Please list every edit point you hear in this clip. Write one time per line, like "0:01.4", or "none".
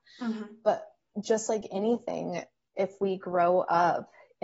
none